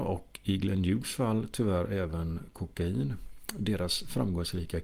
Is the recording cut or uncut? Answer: uncut